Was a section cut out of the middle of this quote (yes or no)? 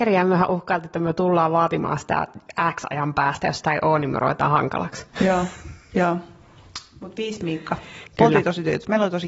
no